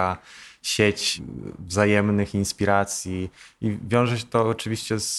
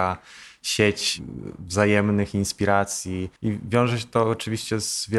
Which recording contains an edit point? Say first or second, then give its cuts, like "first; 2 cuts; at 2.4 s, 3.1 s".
second; 1 cut; at 3.4 s